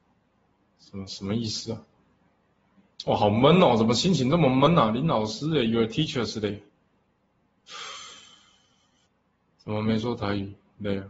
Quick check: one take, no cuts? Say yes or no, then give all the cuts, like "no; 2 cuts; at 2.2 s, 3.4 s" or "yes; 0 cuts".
yes; 0 cuts